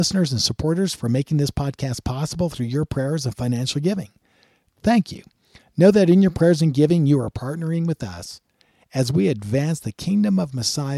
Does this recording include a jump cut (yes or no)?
no